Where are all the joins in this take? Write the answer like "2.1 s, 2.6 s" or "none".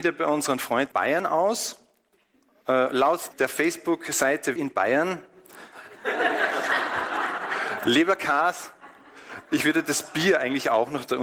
0.9 s, 3.3 s, 4.6 s

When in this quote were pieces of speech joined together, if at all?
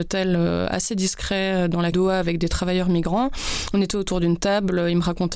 1.9 s

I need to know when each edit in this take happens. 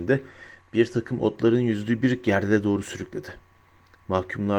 none

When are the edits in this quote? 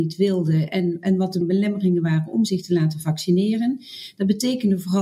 1.4 s

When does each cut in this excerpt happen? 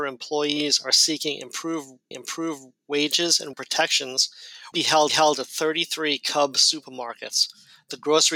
2.1 s, 3.5 s, 4.7 s, 5.1 s

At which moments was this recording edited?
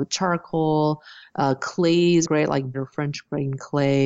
2.2 s, 2.7 s

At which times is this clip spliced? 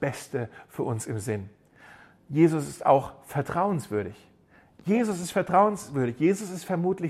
none

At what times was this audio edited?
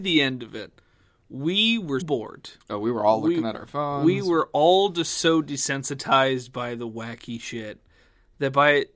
2.0 s

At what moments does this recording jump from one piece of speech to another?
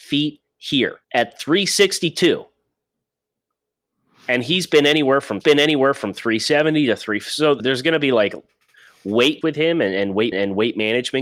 1.0 s, 5.4 s, 7.6 s, 9.4 s, 10.3 s

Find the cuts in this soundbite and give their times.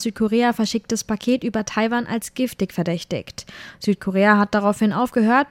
none

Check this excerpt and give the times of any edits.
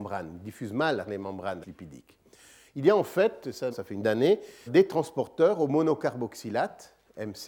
1.1 s, 1.6 s, 3.7 s, 4.0 s, 4.7 s

